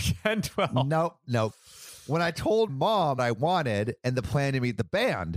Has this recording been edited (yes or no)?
yes